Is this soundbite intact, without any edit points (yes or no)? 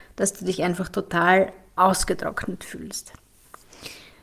yes